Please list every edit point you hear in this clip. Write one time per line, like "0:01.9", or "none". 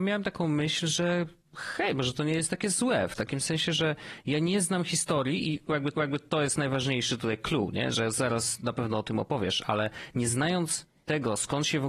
0:05.9